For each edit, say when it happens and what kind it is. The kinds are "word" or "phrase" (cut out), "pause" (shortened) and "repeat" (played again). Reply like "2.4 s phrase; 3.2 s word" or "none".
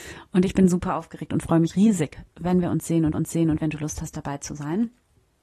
1.7 s word; 3.1 s repeat

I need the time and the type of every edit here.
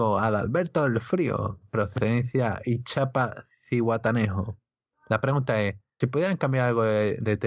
6.0 s word

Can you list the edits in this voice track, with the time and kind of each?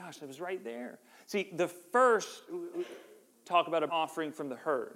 3.4 s word; 3.9 s word

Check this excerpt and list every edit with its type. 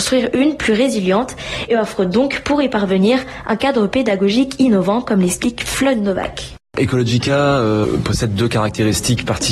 none

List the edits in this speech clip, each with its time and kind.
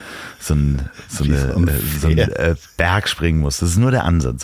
none

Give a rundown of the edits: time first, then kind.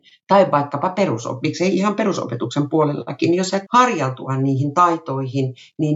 3.7 s word

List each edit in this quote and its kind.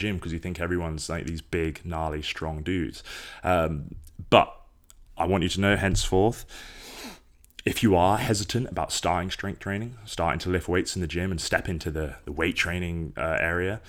none

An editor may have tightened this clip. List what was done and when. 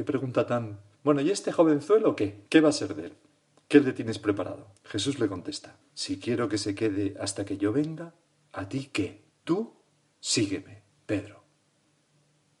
2.5 s pause; 4.8 s pause; 5.8 s pause; 9.3 s pause

